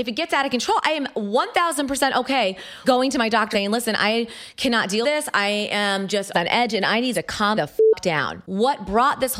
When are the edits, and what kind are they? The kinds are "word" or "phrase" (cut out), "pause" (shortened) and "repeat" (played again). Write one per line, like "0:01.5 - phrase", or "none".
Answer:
0:02.8 - word
0:03.5 - word
0:05.0 - word
0:06.3 - word
0:07.1 - word
0:07.6 - word